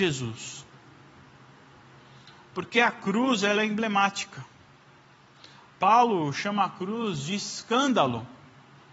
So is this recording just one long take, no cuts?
yes; 0 cuts

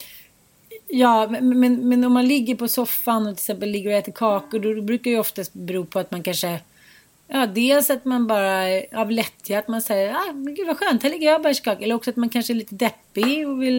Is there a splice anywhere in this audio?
no; 0 cuts

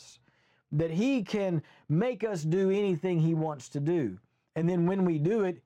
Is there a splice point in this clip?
no; 0 cuts

